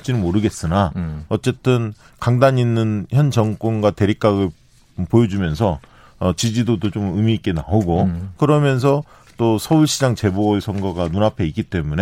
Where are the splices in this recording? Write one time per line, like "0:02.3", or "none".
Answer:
none